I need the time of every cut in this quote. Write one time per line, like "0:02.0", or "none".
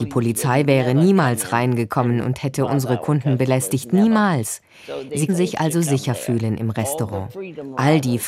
0:05.3